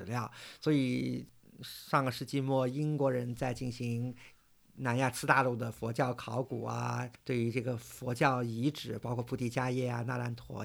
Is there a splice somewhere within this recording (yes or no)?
no